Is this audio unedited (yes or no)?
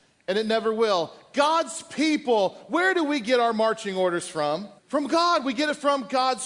no